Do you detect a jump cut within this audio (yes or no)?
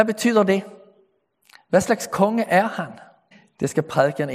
yes